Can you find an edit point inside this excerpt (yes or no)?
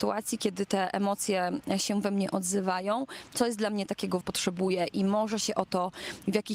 yes